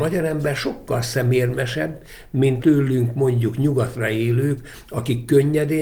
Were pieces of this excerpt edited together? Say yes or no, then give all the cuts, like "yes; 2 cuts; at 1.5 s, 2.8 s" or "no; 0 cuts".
yes; 1 cut; at 2.6 s